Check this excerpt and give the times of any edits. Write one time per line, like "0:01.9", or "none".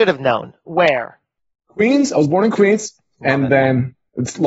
none